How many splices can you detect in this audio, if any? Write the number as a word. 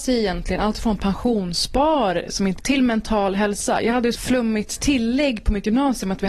two